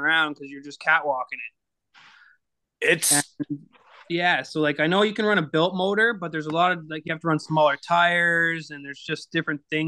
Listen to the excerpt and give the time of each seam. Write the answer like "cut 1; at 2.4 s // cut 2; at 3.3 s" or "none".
none